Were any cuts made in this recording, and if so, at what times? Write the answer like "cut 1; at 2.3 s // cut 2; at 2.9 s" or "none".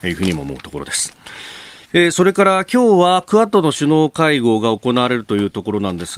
cut 1; at 1.8 s